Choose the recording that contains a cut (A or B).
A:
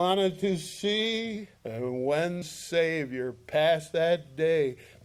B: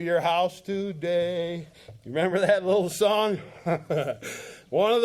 A